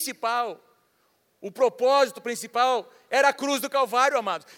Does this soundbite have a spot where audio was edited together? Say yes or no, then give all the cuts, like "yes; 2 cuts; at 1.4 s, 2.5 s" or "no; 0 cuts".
no; 0 cuts